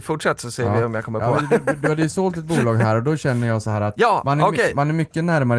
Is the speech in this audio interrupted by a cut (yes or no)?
no